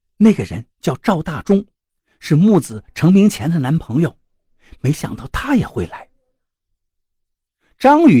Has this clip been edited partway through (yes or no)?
no